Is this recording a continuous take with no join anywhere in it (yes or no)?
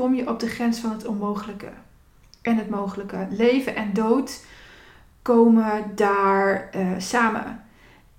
yes